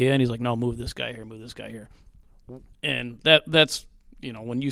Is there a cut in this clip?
no; 0 cuts

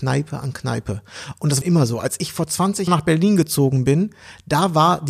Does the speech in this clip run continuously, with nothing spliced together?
no; 2 cuts; at 1.6 s, 2.9 s

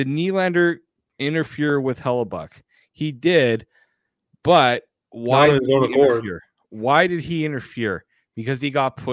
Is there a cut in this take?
no; 0 cuts

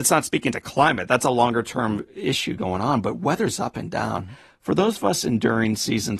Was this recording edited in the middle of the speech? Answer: no; 0 cuts

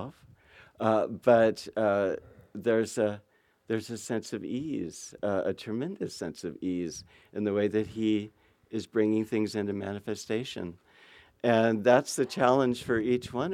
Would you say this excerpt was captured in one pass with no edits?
yes; 0 cuts

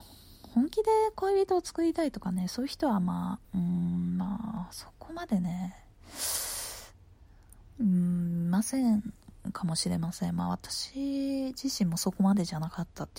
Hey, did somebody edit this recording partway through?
yes; 1 cut; at 3.4 s

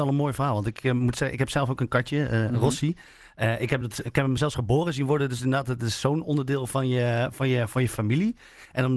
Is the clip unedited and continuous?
yes; 0 cuts

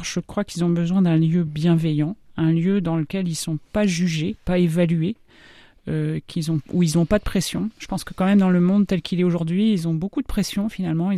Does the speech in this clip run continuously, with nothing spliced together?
yes; 0 cuts

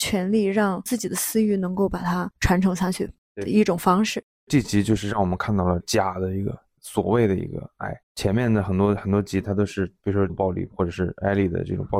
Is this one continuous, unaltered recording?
no; 2 cuts; at 8.0 s, 10.3 s

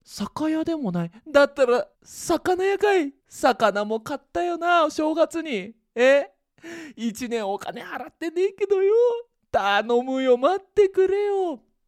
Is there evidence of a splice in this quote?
yes; 3 cuts; at 1.9 s, 3.2 s, 9.4 s

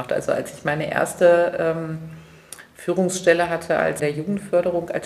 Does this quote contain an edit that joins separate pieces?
yes; 1 cut; at 4.0 s

